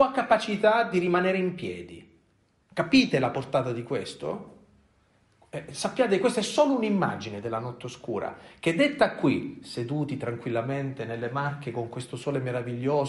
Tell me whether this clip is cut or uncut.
uncut